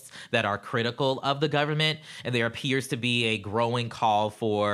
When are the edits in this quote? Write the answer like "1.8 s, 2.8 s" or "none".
none